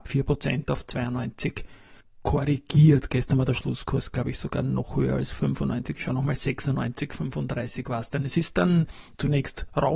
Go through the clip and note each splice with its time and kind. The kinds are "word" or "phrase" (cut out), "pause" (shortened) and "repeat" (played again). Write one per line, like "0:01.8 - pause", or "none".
0:02.0 - pause